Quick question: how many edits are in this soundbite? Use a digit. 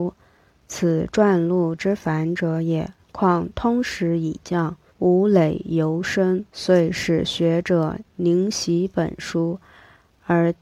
3